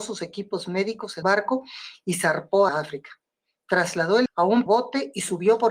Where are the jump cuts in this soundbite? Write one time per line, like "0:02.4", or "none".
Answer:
0:01.2
0:02.7
0:04.3
0:04.7